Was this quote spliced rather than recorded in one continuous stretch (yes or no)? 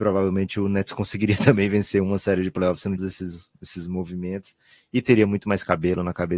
yes